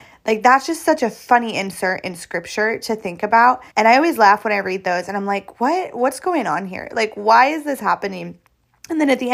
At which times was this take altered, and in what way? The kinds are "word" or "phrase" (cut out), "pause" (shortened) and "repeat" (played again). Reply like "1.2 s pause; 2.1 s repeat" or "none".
3.7 s pause

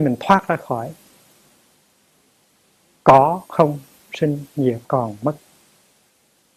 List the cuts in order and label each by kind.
3.5 s pause; 4.8 s pause

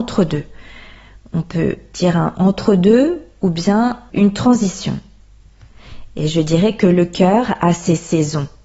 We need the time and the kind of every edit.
4.1 s word

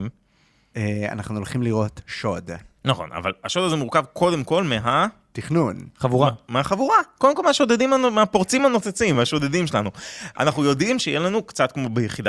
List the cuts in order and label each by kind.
none

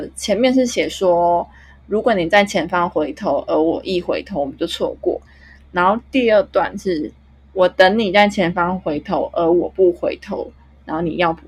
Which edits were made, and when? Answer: none

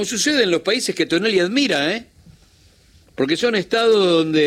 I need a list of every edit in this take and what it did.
none

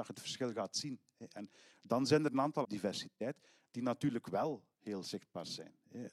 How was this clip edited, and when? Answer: 2.6 s phrase

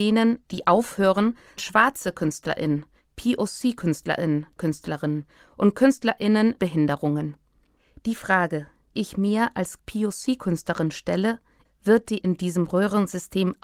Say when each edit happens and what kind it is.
1.6 s word; 4.6 s word; 6.6 s word; 8.9 s word; 9.8 s word; 11.7 s word; 12.2 s word

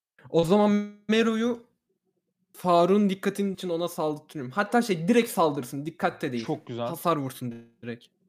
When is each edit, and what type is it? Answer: 3.5 s word

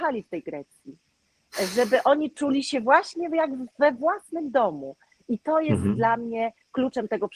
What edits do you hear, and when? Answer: none

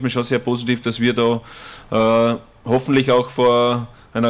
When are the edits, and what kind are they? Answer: none

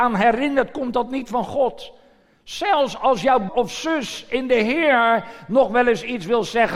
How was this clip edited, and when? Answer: 3.5 s word

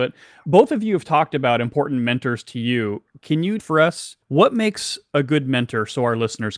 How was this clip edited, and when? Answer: 3.6 s word; 4.2 s pause

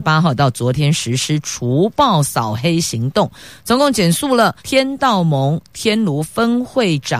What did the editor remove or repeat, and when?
4.6 s pause

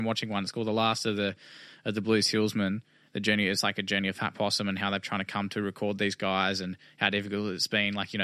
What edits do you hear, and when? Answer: none

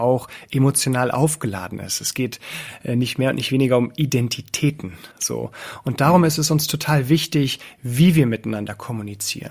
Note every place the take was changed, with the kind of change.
5.1 s pause

